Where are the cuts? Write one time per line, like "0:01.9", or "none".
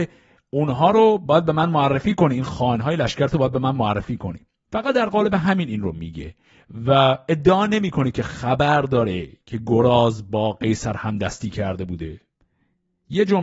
none